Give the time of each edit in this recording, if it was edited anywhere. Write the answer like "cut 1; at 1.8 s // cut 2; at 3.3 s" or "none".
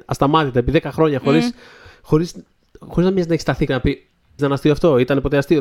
cut 1; at 3.7 s // cut 2; at 4.4 s